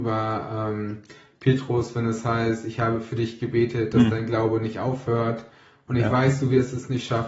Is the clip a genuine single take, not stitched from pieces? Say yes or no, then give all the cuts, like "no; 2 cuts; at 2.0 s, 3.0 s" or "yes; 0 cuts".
yes; 0 cuts